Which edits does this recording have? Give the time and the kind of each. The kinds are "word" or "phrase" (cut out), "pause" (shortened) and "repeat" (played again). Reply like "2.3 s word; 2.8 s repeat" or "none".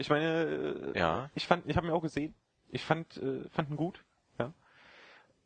none